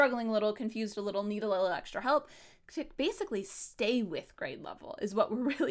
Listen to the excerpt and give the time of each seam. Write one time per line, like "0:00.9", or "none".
none